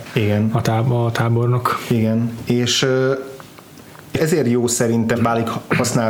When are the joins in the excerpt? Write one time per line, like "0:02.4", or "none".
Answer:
0:04.1
0:05.1